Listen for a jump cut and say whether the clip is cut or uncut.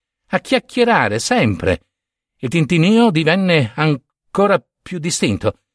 uncut